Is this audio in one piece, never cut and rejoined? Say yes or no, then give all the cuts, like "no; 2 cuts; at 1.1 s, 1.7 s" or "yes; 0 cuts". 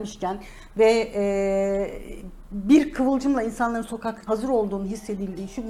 no; 1 cut; at 4.3 s